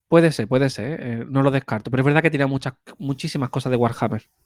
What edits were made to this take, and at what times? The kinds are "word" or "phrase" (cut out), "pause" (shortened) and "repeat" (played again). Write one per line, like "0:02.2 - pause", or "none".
0:01.3 - word